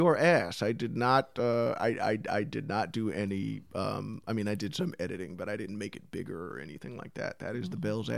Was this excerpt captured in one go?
no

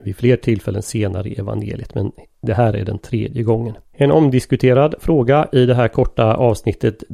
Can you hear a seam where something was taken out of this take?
yes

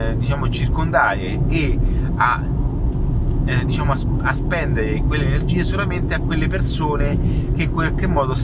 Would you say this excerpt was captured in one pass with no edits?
yes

